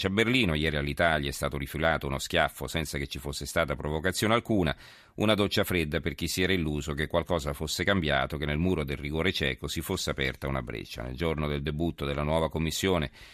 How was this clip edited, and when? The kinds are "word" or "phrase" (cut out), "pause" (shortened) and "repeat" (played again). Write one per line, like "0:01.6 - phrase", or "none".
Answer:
none